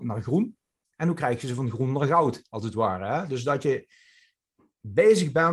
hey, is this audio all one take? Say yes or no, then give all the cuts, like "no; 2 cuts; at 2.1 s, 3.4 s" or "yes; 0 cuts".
yes; 0 cuts